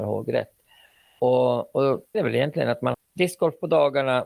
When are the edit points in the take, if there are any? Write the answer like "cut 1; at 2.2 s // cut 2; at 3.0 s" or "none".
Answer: cut 1; at 2.1 s // cut 2; at 2.9 s